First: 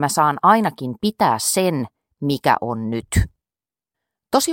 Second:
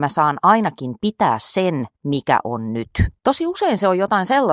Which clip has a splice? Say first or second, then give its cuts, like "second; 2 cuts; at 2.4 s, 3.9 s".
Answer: second; 2 cuts; at 1.9 s, 3.2 s